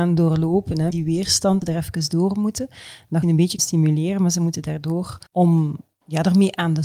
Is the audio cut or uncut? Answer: cut